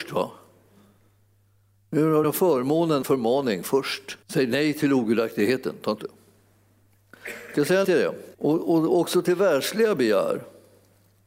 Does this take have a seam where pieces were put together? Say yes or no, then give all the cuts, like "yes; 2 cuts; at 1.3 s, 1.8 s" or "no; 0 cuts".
yes; 6 cuts; at 2.2 s, 3.0 s, 4.2 s, 6.0 s, 7.8 s, 8.3 s